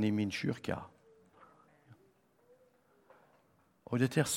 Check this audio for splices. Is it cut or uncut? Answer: uncut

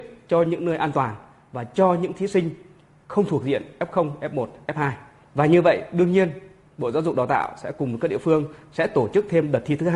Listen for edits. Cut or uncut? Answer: uncut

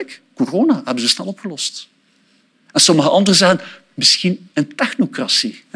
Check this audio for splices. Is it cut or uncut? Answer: uncut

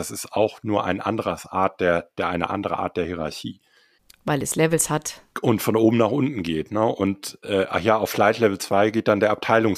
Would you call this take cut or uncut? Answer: uncut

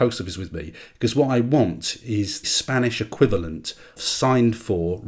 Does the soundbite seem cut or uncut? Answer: cut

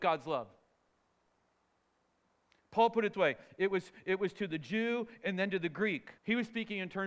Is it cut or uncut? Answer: cut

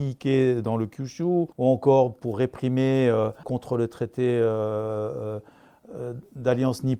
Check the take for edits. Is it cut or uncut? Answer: cut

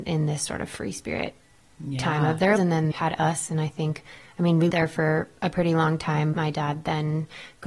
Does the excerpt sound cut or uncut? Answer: cut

